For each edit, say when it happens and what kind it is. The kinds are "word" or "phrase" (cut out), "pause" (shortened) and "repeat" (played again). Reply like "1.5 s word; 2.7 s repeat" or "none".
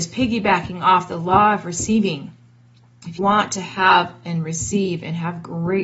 3.2 s word